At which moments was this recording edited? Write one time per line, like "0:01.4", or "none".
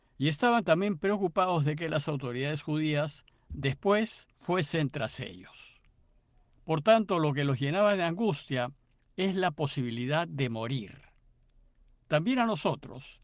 0:04.3